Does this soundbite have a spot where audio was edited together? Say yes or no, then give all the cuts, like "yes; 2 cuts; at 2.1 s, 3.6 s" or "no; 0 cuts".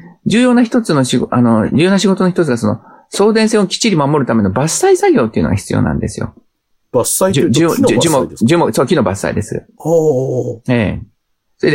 no; 0 cuts